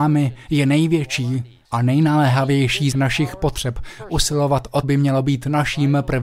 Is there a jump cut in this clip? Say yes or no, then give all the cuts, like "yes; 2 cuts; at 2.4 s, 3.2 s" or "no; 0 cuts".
yes; 3 cuts; at 1.6 s, 2.9 s, 4.8 s